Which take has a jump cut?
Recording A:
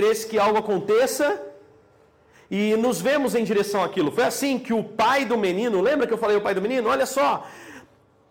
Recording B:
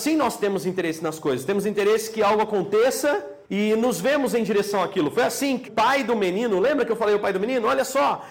B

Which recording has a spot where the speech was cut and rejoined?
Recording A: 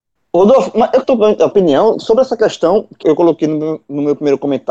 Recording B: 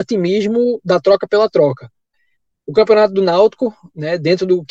A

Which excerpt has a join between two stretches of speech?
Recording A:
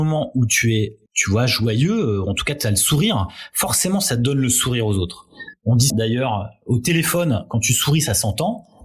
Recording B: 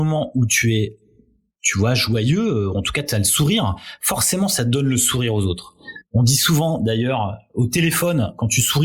A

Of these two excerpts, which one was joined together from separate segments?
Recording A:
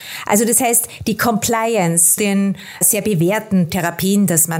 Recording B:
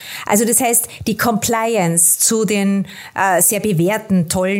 A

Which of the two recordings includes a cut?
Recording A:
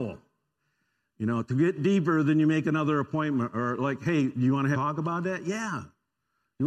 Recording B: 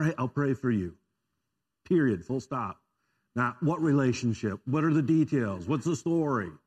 A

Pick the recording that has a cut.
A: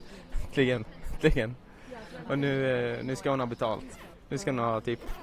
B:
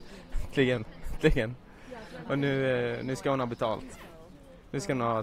A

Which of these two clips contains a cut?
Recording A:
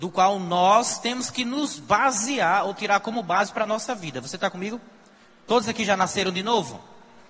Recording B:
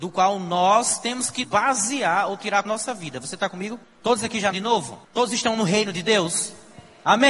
B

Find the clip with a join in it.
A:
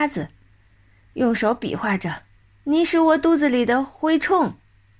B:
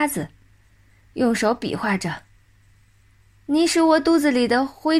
A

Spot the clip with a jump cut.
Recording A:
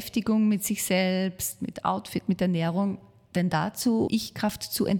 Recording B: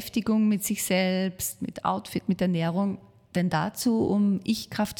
A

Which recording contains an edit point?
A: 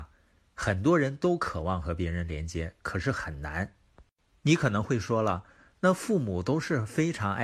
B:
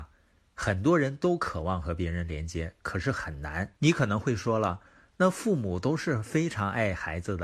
B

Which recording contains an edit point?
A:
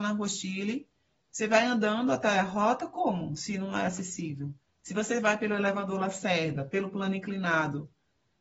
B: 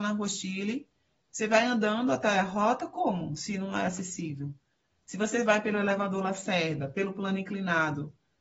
A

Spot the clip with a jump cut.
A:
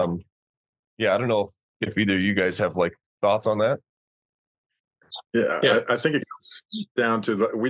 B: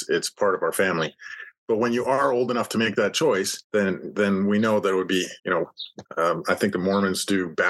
B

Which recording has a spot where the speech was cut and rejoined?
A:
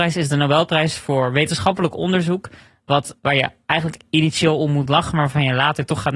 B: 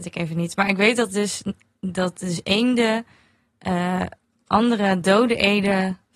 A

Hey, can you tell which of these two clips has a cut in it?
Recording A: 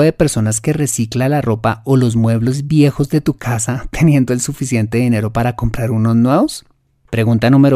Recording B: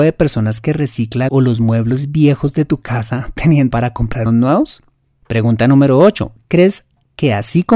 B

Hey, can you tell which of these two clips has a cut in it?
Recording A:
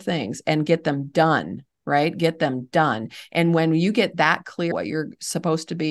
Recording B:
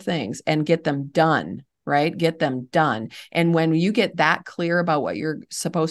A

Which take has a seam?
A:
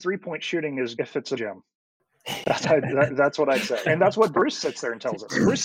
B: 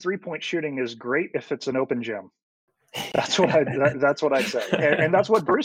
A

